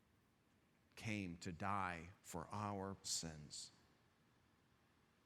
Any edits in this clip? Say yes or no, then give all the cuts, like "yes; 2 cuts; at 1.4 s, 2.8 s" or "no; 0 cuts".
yes; 2 cuts; at 2.2 s, 3.0 s